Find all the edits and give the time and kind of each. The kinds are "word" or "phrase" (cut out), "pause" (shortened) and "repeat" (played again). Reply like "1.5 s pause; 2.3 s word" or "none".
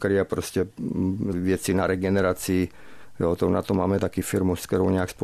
1.3 s word